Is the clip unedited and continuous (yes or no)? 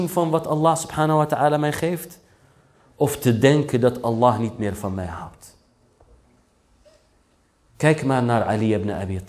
yes